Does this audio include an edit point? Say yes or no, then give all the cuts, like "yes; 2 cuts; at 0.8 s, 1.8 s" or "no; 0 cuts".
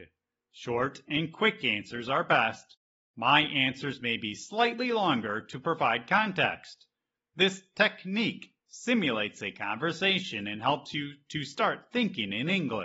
no; 0 cuts